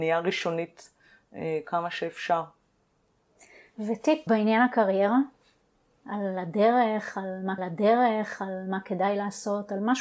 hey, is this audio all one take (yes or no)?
no